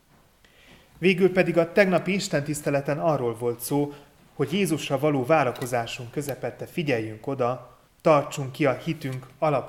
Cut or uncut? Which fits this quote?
cut